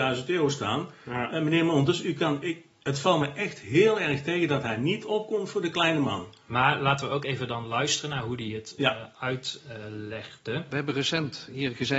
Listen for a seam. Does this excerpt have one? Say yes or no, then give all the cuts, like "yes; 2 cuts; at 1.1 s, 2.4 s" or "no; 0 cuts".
no; 0 cuts